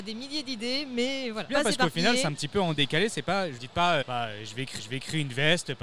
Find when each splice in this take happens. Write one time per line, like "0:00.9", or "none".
0:01.5
0:03.6
0:04.0
0:04.8